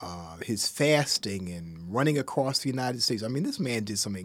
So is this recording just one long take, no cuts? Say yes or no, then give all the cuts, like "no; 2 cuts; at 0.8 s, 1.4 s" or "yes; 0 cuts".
yes; 0 cuts